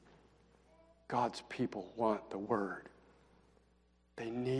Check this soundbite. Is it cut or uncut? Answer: uncut